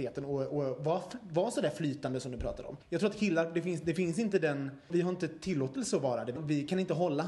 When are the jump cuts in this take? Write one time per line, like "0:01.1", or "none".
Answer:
0:02.8
0:04.9
0:06.4